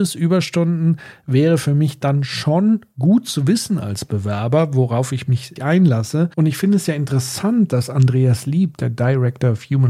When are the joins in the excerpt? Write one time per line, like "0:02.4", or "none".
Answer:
0:05.6